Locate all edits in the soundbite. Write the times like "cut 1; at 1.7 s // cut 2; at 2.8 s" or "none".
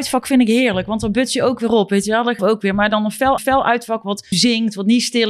cut 1; at 2.4 s // cut 2; at 3.4 s // cut 3; at 4.3 s

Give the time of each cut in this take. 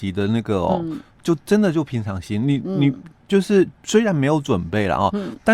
cut 1; at 3.7 s

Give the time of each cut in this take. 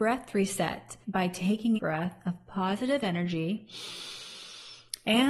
cut 1; at 1.0 s // cut 2; at 1.8 s

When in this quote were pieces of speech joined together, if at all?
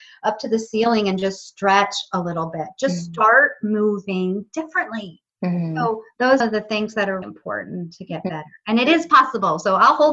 cut 1; at 6.4 s // cut 2; at 7.2 s

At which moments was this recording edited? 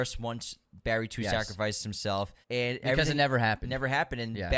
cut 1; at 2.4 s

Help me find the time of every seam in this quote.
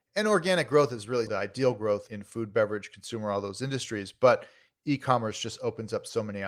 cut 1; at 1.3 s

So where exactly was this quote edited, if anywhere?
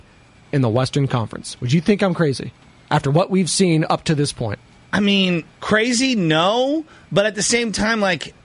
cut 1; at 5.5 s

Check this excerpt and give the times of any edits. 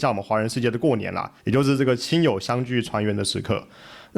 cut 1; at 1.4 s

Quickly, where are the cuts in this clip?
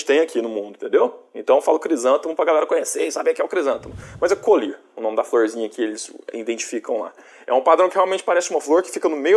none

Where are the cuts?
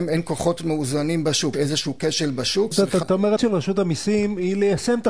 cut 1; at 1.5 s // cut 2; at 2.7 s // cut 3; at 3.0 s // cut 4; at 3.4 s

